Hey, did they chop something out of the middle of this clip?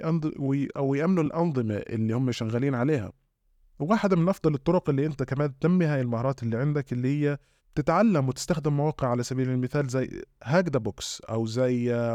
no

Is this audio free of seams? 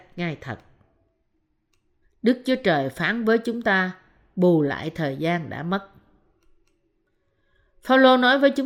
yes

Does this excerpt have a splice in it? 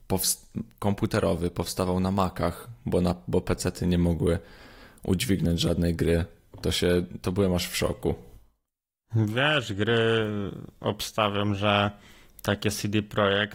no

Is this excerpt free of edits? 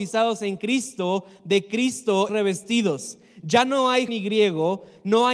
no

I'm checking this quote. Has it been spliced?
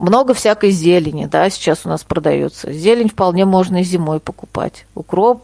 no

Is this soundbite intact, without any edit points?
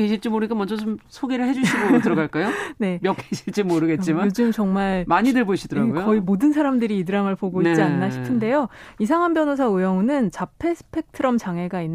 no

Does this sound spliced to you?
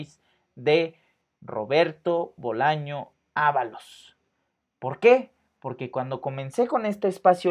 no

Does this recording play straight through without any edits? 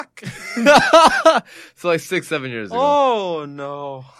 yes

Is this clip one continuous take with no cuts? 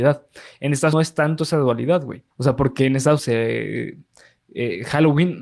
no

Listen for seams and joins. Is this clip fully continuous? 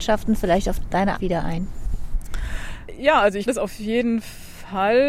no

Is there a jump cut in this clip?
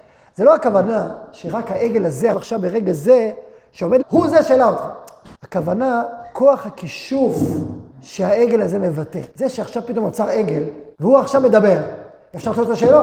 yes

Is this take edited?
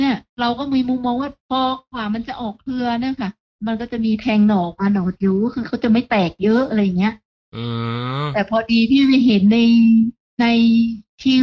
no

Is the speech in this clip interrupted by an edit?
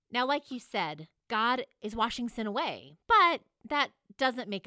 yes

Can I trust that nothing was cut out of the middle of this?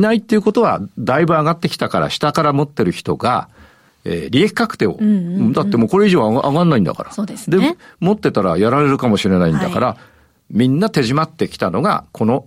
yes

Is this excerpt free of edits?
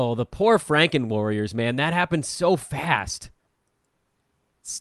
yes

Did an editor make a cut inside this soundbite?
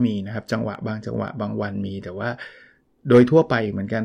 no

